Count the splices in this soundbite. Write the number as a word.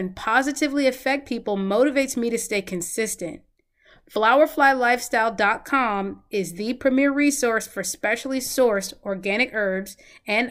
zero